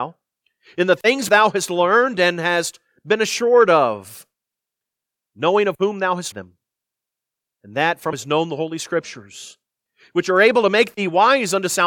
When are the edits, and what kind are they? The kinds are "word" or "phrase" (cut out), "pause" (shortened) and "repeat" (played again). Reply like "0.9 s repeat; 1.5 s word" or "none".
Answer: 1.3 s word; 6.3 s word; 8.1 s phrase